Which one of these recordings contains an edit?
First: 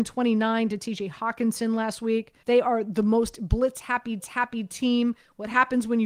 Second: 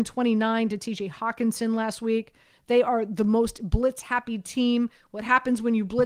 first; 2 cuts; at 2.4 s, 4.2 s

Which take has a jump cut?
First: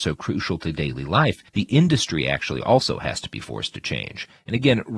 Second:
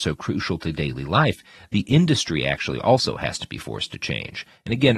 first; 1 cut; at 1.5 s

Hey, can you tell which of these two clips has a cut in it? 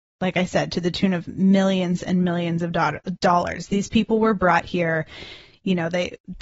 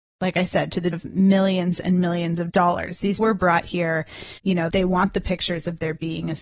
second; 5 cuts; at 0.9 s, 2.5 s, 3.2 s, 4.4 s, 4.7 s

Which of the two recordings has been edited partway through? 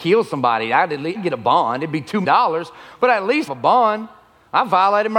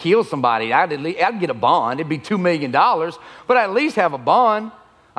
first; 3 cuts; at 1.1 s, 2.2 s, 3.5 s

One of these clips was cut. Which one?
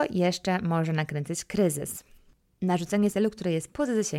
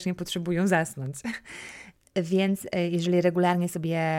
first; 1 cut; at 3.1 s

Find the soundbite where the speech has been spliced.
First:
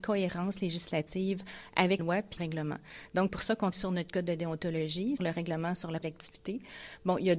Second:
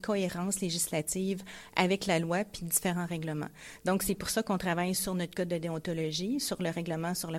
first; 6 cuts; at 2.0 s, 2.4 s, 3.3 s, 3.7 s, 5.2 s, 6.0 s

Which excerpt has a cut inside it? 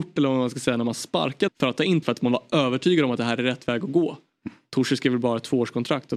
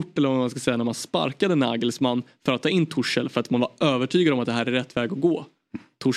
first; 2 cuts; at 1.5 s, 2.0 s

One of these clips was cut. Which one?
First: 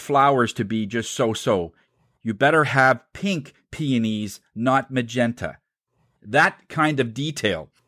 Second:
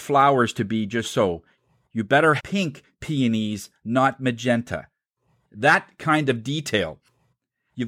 second; 2 cuts; at 1.0 s, 2.4 s

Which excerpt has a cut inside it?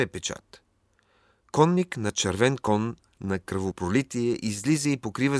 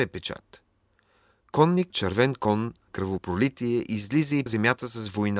second; 3 cuts; at 1.9 s, 2.9 s, 4.5 s

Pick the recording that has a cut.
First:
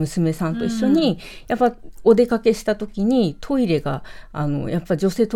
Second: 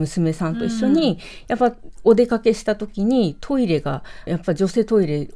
second; 1 cut; at 4.3 s

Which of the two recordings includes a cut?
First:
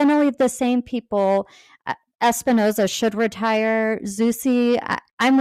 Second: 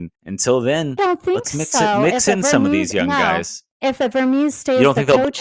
second; 1 cut; at 1.0 s

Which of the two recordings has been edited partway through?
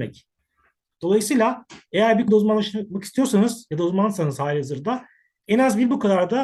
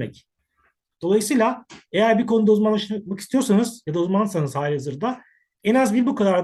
first; 1 cut; at 2.3 s

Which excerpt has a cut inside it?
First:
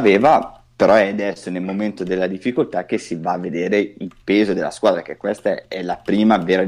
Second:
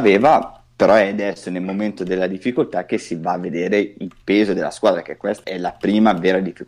second; 1 cut; at 5.4 s

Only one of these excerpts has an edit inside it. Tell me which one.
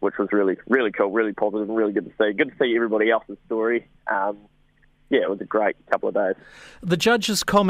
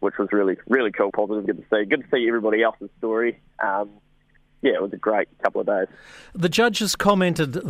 second; 2 cuts; at 1.1 s, 1.5 s

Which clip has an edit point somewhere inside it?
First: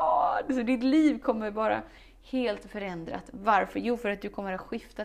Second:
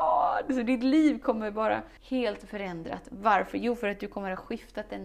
second; 1 cut; at 2.0 s

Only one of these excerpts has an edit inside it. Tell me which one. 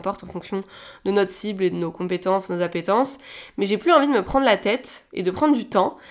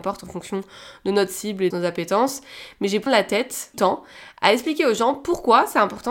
second; 3 cuts; at 1.7 s, 3.1 s, 3.7 s

